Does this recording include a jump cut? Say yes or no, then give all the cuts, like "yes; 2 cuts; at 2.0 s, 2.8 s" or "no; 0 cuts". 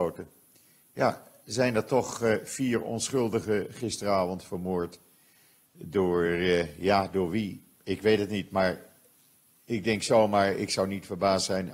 no; 0 cuts